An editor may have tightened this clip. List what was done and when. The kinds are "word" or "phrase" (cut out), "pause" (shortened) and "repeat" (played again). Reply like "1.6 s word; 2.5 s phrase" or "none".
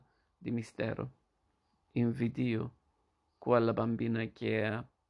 none

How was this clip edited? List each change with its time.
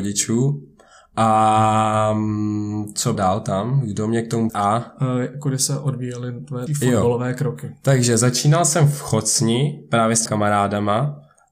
3.2 s word; 4.5 s word; 6.7 s word; 10.3 s word

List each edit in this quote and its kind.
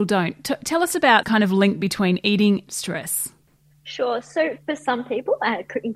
1.2 s word; 2.7 s word

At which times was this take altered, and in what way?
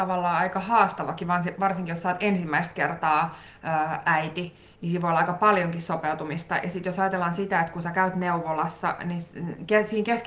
none

